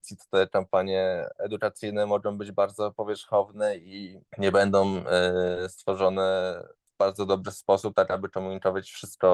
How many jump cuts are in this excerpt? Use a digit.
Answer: 1